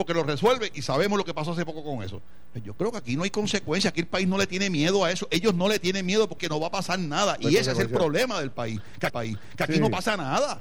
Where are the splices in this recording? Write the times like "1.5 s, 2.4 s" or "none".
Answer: 6.4 s, 9.1 s